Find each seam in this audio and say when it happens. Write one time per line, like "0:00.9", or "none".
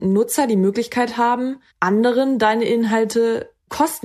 0:01.7